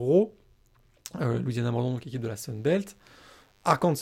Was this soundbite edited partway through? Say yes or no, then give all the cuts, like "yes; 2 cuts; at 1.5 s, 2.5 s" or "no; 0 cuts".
no; 0 cuts